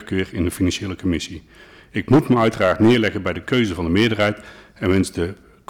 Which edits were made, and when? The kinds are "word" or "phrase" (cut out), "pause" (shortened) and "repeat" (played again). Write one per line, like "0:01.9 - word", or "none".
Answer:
none